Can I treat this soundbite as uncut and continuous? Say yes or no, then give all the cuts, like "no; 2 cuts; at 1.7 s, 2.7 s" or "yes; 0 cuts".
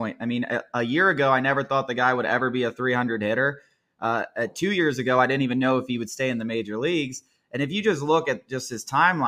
yes; 0 cuts